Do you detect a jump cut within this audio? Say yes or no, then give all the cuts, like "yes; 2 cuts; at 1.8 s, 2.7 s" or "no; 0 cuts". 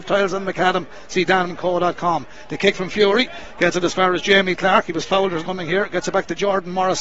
yes; 3 cuts; at 1.5 s, 2.7 s, 5.4 s